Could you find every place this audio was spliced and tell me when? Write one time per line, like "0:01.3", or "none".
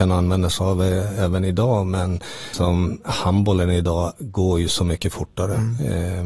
0:02.5